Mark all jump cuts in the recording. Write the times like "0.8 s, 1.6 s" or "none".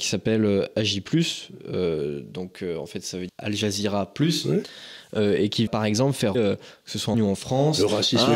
3.3 s, 5.7 s, 6.3 s, 7.1 s